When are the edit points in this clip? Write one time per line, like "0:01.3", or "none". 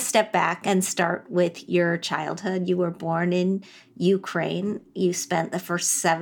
none